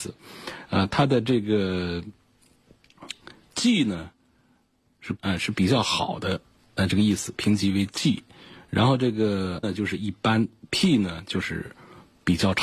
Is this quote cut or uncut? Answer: cut